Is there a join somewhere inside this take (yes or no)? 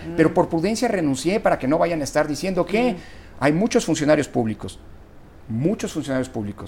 no